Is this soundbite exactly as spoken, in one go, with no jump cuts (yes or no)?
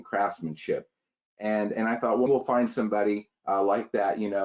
no